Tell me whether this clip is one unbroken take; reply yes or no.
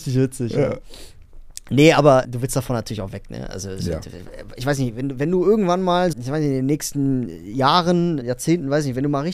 no